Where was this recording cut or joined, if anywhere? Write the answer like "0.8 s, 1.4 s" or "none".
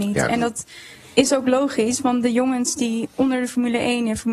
none